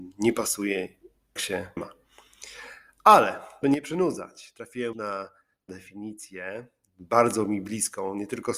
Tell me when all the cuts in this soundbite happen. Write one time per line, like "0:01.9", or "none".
0:01.4
0:01.8
0:03.6
0:04.9
0:05.7